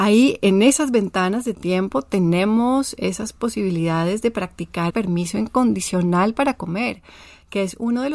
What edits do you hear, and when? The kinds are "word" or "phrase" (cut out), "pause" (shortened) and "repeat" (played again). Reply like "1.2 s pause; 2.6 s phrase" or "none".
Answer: 4.9 s word